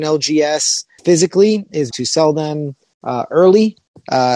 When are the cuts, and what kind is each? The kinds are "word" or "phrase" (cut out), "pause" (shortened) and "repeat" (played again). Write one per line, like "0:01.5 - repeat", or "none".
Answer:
0:01.0 - word
0:01.9 - phrase